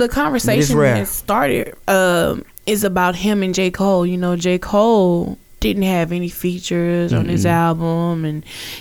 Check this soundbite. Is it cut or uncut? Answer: cut